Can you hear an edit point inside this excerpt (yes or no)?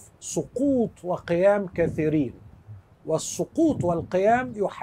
no